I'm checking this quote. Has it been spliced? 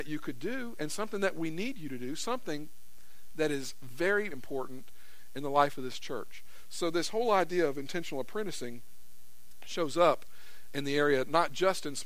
yes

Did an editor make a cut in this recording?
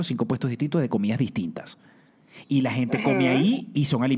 no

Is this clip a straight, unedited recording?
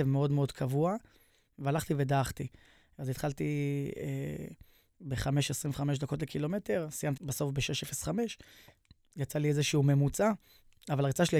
no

